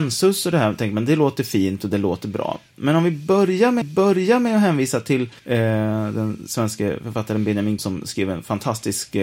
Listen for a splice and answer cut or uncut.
cut